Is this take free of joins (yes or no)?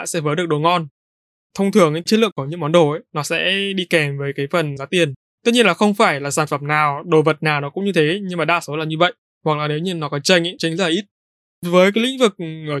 no